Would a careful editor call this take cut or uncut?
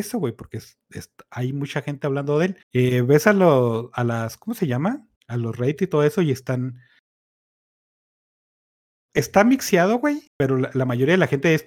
cut